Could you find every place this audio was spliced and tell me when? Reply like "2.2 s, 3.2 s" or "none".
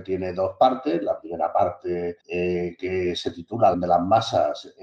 2.2 s, 3.7 s